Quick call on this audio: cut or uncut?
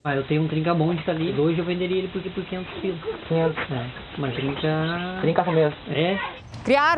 cut